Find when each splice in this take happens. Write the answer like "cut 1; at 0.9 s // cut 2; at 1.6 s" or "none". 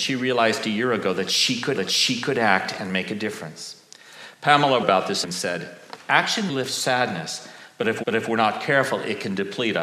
cut 1; at 1.7 s // cut 2; at 4.8 s // cut 3; at 5.2 s // cut 4; at 6.5 s // cut 5; at 8.0 s